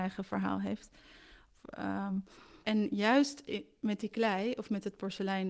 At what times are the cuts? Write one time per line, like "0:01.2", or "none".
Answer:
0:02.6